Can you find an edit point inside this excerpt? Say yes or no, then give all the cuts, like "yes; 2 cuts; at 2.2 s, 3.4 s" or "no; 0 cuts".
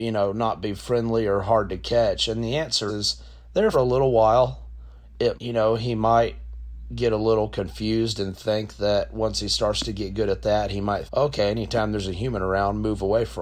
yes; 4 cuts; at 2.9 s, 3.7 s, 5.3 s, 11.1 s